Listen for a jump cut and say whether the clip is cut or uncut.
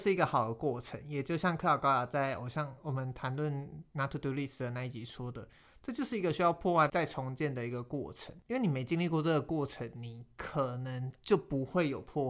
uncut